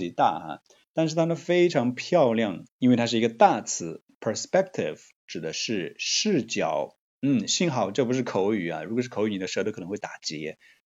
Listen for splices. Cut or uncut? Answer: cut